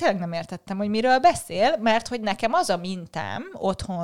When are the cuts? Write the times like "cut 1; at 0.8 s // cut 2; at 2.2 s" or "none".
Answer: none